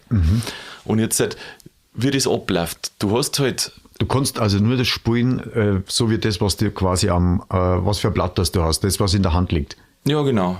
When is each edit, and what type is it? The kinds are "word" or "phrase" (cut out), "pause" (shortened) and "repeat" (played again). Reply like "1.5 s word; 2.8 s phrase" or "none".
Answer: none

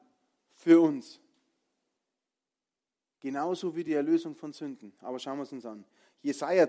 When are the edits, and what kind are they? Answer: none

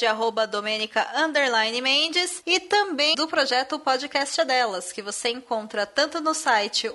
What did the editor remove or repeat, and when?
3.1 s word

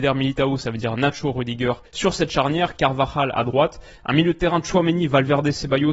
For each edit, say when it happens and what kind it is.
1.9 s pause

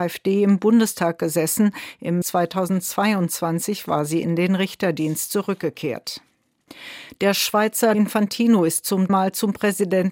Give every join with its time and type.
2.2 s word; 7.9 s word; 9.1 s word

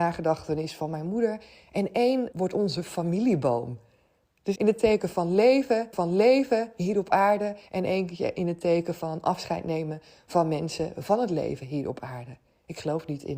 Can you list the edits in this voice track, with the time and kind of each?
2.3 s word; 4.6 s word; 5.9 s repeat; 7.7 s pause

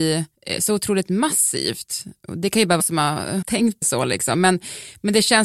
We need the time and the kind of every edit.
2.8 s word; 3.4 s word; 3.8 s word

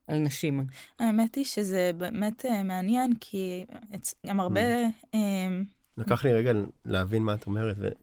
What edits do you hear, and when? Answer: none

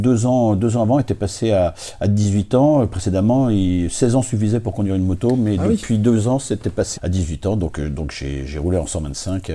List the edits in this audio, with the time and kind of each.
7.0 s word

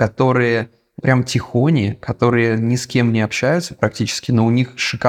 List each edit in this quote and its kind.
1.0 s word

